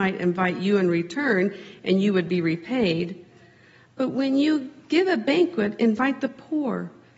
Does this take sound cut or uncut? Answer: uncut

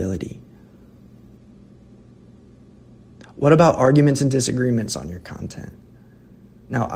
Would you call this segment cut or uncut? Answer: uncut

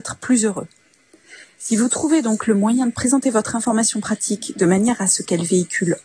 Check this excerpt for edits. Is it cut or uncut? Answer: uncut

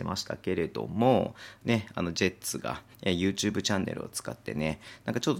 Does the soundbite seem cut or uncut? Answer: cut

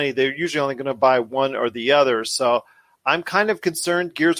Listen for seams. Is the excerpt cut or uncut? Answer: uncut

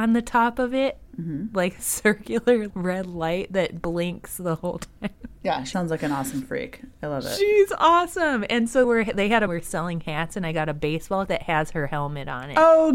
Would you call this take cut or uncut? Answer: cut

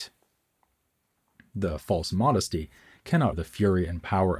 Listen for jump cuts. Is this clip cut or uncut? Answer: cut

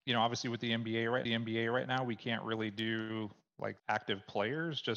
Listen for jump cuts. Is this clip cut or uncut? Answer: cut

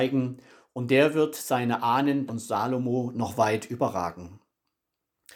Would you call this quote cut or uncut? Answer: cut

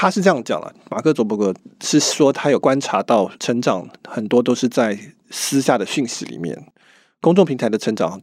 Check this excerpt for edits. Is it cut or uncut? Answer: uncut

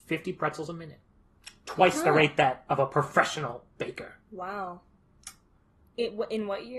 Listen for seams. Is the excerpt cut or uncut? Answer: cut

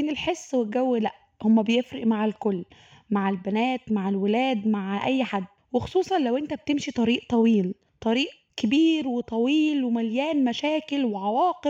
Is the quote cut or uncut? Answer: uncut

